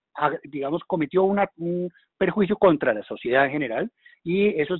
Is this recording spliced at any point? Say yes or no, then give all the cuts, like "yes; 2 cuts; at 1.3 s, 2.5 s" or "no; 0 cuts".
no; 0 cuts